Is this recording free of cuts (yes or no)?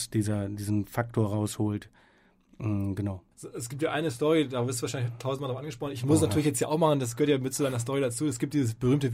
no